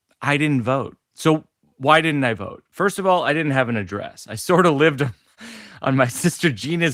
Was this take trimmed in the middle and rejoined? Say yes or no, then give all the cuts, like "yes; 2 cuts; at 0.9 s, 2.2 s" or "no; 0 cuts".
yes; 1 cut; at 1.0 s